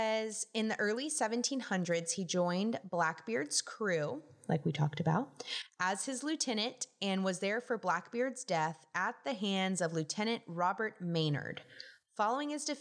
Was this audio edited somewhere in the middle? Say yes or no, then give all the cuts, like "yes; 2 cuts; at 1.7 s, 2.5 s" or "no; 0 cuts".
no; 0 cuts